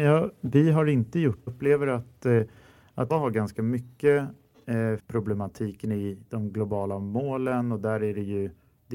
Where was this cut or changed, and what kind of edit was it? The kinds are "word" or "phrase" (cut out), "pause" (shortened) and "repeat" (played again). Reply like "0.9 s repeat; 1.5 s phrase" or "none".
1.5 s phrase; 3.1 s word; 5.0 s phrase